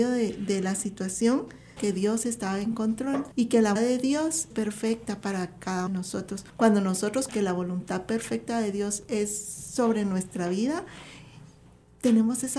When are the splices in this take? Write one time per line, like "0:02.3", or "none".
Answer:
0:01.8
0:03.3
0:03.8
0:04.5
0:05.9
0:06.5
0:07.3